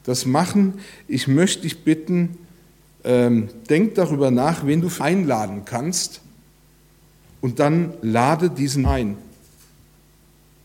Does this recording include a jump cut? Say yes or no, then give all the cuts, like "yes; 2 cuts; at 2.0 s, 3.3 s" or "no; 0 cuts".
yes; 2 cuts; at 5.0 s, 8.8 s